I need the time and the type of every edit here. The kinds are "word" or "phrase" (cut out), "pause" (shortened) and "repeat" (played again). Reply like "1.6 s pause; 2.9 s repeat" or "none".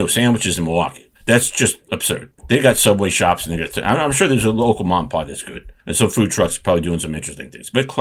1.2 s pause; 2.4 s pause; 5.8 s pause